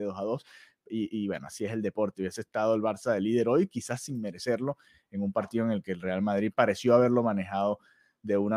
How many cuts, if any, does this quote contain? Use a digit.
0